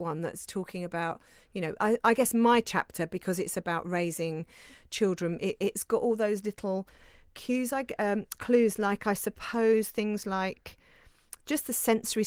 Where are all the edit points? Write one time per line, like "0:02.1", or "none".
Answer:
none